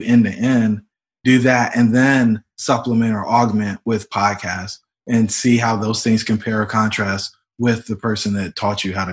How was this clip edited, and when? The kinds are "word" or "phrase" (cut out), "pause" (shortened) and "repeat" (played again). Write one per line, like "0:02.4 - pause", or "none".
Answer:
none